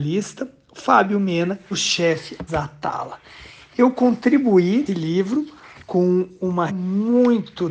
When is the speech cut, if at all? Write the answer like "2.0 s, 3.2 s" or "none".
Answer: 1.7 s, 2.5 s, 4.9 s, 6.7 s